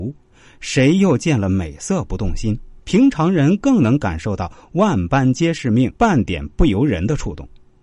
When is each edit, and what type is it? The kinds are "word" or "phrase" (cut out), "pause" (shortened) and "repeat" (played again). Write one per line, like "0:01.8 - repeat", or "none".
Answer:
0:02.8 - pause
0:06.0 - pause